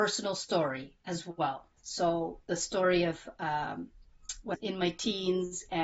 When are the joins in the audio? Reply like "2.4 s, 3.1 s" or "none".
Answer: 4.5 s